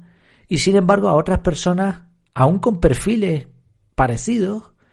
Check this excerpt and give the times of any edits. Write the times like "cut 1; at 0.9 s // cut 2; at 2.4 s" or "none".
none